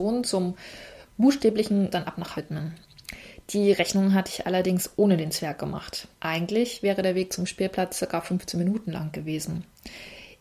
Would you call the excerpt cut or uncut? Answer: cut